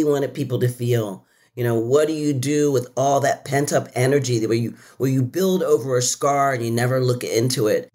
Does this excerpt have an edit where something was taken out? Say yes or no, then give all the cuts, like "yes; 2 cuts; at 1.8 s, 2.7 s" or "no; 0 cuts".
no; 0 cuts